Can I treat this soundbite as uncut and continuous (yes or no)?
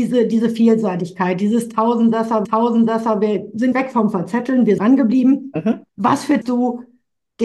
no